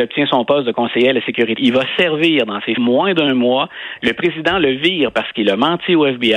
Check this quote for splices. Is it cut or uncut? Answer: cut